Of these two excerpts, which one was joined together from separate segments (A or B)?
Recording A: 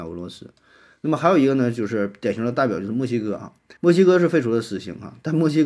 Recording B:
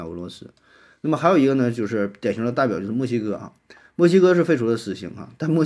A